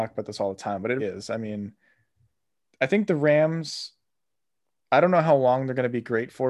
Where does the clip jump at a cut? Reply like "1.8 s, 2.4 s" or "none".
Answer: 1.0 s